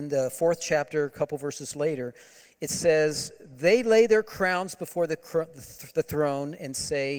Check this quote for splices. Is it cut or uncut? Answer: uncut